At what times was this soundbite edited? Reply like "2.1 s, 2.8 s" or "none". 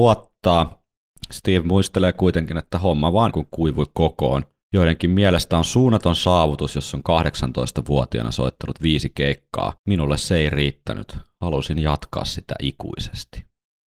3.3 s, 4.6 s, 9.8 s